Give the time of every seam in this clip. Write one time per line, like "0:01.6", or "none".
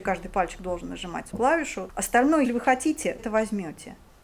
0:01.3
0:02.4
0:03.2